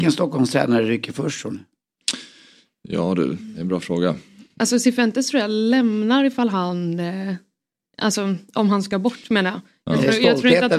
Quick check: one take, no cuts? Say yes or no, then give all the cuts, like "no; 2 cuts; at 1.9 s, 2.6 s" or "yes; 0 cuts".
yes; 0 cuts